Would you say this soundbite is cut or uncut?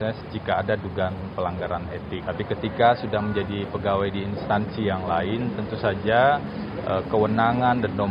uncut